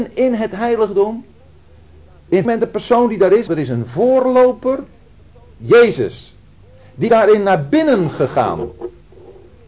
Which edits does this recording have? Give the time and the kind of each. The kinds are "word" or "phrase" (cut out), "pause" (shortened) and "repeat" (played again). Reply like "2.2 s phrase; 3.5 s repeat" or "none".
2.4 s word; 3.5 s word; 7.1 s word